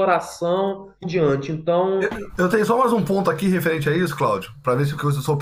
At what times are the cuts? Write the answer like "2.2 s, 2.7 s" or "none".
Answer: 1.0 s